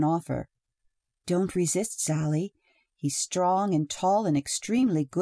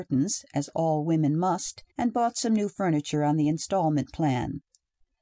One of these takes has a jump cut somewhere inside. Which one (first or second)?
second